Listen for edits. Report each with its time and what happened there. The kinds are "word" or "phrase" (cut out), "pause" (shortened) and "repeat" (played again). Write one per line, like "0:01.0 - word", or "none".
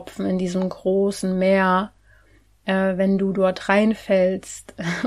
none